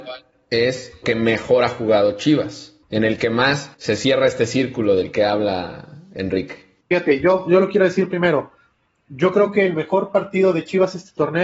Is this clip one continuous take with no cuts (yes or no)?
no